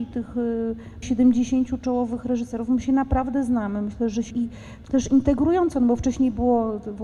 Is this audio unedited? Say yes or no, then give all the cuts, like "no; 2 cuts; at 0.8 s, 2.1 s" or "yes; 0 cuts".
no; 3 cuts; at 1.0 s, 4.3 s, 4.9 s